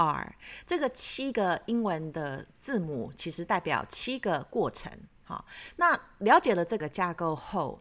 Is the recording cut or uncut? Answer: cut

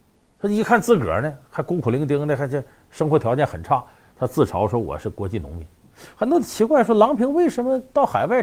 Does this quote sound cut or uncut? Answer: uncut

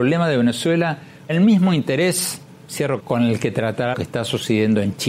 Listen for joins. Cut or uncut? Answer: cut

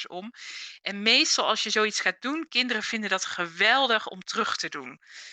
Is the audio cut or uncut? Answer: uncut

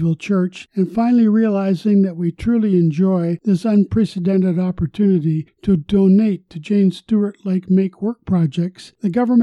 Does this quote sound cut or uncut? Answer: uncut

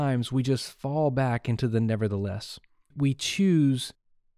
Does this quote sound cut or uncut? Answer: uncut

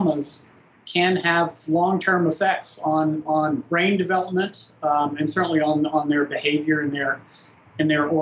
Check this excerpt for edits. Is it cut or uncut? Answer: uncut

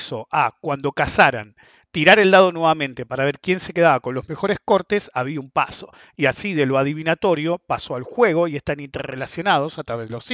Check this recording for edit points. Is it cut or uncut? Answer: uncut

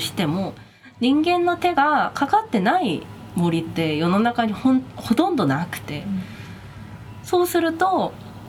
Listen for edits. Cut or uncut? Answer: uncut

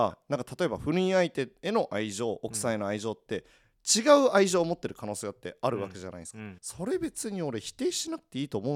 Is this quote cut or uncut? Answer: cut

